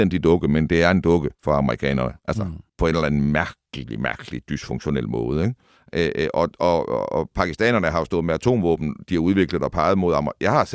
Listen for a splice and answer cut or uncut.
cut